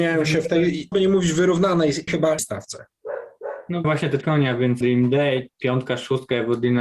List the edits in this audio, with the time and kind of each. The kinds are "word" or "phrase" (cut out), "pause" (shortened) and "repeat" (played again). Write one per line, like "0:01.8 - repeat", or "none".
0:00.9 - word
0:02.1 - word
0:02.4 - word
0:03.8 - word
0:04.2 - word
0:04.8 - word
0:05.5 - word